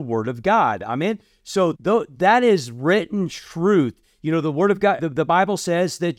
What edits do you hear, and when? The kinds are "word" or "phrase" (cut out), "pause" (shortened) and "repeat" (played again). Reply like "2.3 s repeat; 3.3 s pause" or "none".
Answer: 1.7 s word; 5.0 s word